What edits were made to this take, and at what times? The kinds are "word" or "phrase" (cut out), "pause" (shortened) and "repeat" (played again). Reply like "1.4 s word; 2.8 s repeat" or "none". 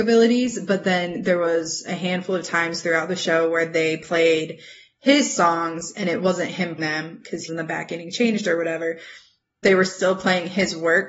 6.8 s word; 7.5 s word; 9.6 s word